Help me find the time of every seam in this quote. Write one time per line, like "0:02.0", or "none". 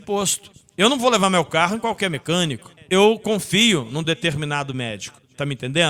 none